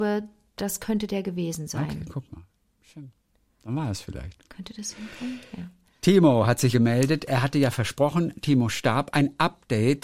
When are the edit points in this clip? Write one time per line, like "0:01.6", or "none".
0:06.7